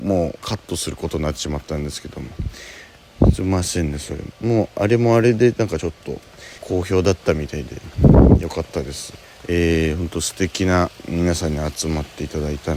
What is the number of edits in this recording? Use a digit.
3